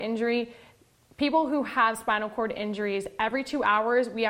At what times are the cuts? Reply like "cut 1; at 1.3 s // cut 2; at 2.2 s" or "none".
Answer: none